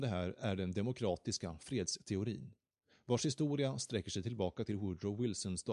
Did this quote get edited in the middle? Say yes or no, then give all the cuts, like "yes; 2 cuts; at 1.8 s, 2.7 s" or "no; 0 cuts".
no; 0 cuts